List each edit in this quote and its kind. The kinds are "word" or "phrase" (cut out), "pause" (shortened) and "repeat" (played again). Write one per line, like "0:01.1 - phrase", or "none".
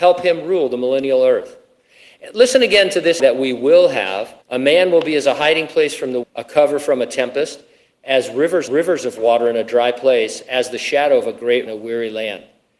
0:03.2 - word
0:04.4 - pause
0:06.2 - word
0:08.7 - repeat
0:11.7 - phrase